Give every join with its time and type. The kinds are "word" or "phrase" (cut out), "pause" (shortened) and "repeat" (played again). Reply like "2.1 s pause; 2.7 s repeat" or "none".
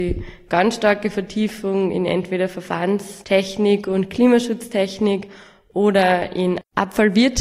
none